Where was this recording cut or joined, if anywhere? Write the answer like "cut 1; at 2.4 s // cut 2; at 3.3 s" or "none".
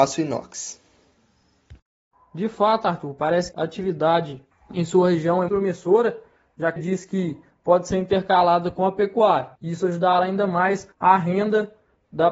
cut 1; at 3.5 s // cut 2; at 4.5 s // cut 3; at 5.5 s // cut 4; at 6.8 s // cut 5; at 9.6 s // cut 6; at 10.9 s